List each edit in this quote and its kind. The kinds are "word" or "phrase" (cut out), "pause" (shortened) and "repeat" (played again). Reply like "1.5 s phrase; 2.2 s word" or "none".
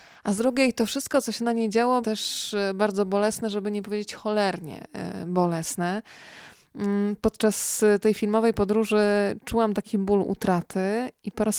2.0 s word